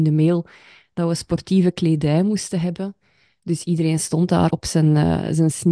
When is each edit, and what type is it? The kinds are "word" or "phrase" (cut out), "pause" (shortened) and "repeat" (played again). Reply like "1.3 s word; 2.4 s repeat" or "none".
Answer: 4.5 s word